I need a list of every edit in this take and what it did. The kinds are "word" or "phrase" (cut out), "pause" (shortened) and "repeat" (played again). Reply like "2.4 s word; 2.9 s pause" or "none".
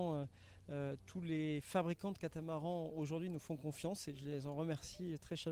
none